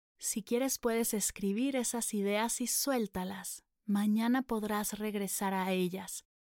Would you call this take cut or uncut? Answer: uncut